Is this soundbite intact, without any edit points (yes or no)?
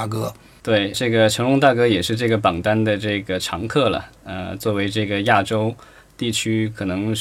no